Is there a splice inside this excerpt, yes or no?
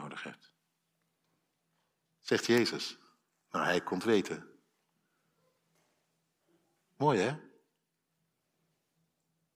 no